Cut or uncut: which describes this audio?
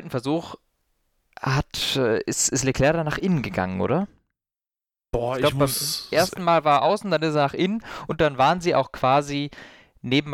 uncut